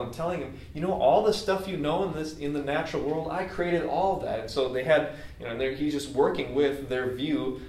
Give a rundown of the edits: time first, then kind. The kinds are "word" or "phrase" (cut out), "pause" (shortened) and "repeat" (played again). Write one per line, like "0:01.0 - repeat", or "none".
none